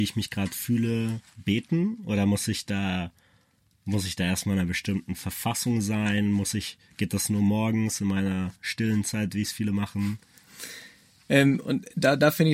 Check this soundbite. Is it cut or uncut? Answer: uncut